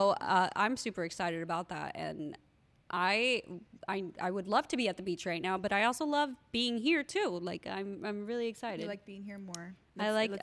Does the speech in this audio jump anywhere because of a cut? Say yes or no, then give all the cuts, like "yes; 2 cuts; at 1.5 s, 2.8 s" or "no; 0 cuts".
no; 0 cuts